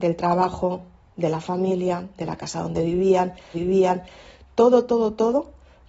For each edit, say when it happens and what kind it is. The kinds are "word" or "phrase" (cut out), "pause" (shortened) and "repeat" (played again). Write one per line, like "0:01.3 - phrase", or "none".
0:03.5 - repeat

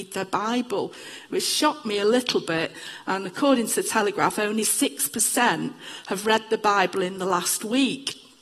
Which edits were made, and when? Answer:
none

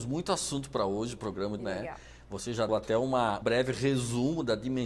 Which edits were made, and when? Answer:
0:01.6 - phrase
0:02.7 - word
0:03.4 - word

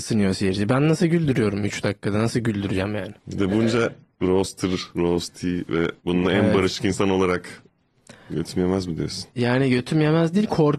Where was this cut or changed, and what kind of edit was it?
0:03.2 - pause
0:04.9 - pause
0:06.0 - pause

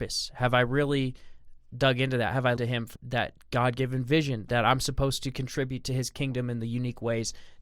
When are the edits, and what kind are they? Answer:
0:02.6 - word
0:03.0 - word

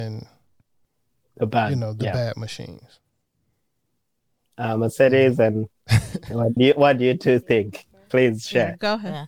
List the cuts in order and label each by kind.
0:06.6 - word

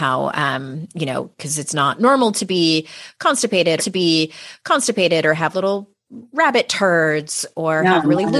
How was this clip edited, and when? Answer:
0:03.8 - repeat
0:05.5 - word

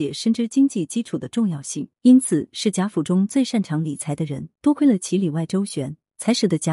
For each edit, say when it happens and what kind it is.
0:01.9 - pause
0:04.5 - pause

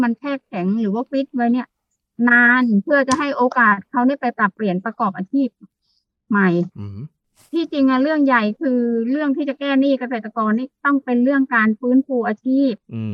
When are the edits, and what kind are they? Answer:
none

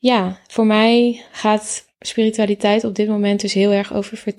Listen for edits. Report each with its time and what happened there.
0:01.3 - pause

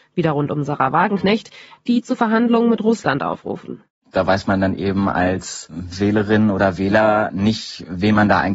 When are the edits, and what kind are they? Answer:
none

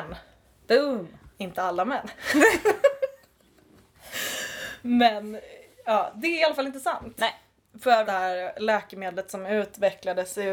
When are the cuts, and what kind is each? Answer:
0:08.0 - word

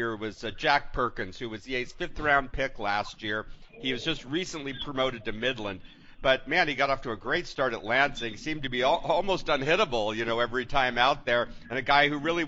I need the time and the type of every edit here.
none

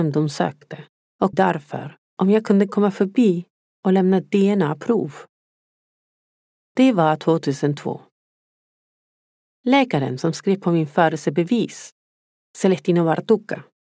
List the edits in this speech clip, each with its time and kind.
0:01.3 - phrase

